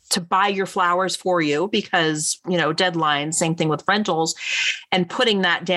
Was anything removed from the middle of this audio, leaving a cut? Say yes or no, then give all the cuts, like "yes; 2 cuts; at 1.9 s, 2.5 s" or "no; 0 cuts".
no; 0 cuts